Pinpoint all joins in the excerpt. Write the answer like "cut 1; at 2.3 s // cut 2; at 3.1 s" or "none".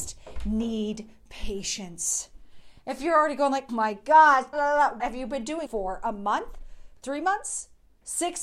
cut 1; at 3.7 s // cut 2; at 4.5 s // cut 3; at 5.0 s // cut 4; at 5.7 s